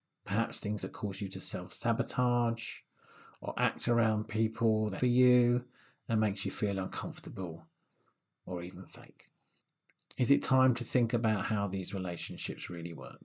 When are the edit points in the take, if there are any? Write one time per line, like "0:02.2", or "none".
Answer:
0:05.0